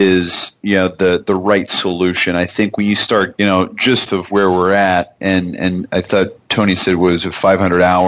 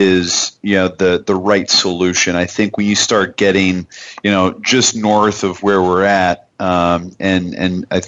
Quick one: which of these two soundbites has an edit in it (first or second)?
first